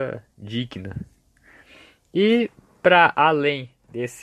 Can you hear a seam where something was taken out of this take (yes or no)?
no